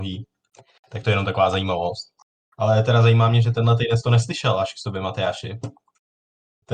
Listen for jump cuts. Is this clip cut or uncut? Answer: uncut